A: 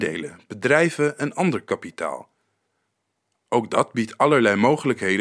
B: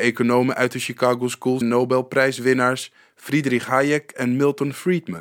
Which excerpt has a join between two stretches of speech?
B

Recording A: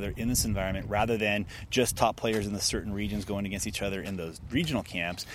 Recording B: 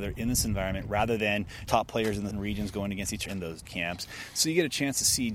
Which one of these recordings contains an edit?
B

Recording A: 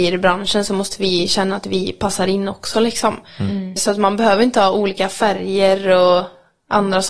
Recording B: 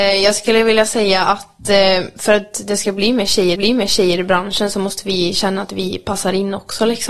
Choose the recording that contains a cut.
B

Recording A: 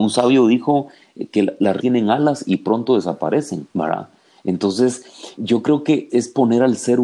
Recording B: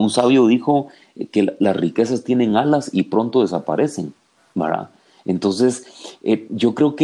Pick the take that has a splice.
A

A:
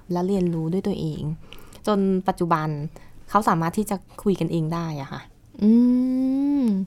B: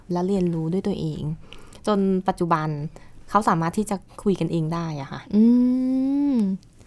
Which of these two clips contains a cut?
B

